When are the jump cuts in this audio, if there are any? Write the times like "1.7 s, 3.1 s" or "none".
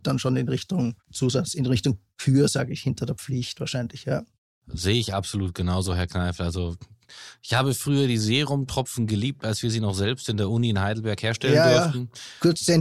none